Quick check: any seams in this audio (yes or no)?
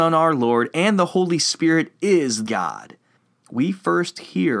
yes